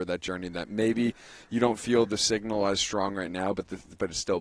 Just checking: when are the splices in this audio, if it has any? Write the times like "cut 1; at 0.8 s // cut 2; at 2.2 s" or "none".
none

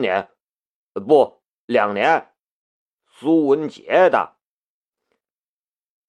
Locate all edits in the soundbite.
none

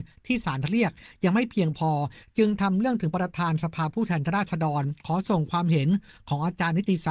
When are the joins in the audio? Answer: none

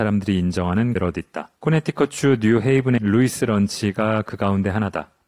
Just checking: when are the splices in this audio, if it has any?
cut 1; at 1.0 s // cut 2; at 1.6 s // cut 3; at 3.0 s

